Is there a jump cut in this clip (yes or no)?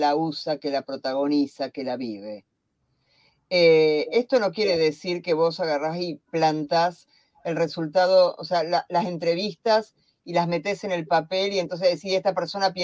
no